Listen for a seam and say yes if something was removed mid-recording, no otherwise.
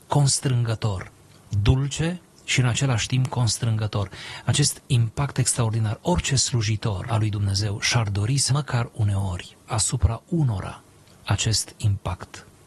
yes